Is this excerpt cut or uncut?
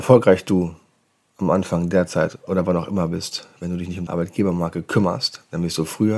cut